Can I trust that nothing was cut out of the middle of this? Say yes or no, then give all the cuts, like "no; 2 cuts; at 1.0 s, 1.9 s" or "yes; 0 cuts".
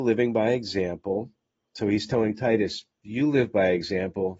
yes; 0 cuts